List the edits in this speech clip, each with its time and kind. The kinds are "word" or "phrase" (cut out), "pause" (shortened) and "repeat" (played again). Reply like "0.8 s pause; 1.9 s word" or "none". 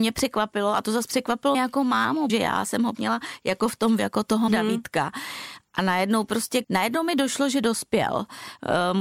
1.5 s word; 2.3 s word; 2.9 s word; 4.0 s word; 4.5 s word; 6.6 s word